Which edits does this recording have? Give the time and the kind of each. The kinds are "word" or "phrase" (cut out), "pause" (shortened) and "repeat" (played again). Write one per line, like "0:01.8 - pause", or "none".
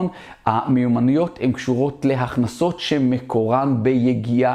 none